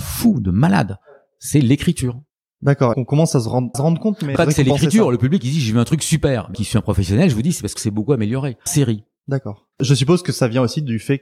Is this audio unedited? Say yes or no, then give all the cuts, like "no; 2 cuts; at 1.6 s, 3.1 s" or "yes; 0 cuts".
no; 7 cuts; at 2.9 s, 3.7 s, 4.4 s, 6.5 s, 7.8 s, 8.7 s, 9.7 s